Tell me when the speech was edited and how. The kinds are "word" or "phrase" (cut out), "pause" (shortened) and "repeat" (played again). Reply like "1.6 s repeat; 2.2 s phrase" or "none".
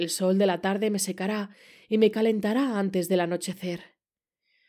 none